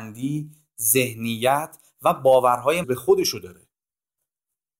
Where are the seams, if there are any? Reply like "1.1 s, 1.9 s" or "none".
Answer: 2.8 s